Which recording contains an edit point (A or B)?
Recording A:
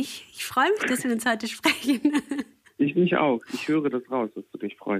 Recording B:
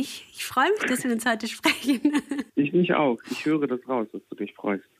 B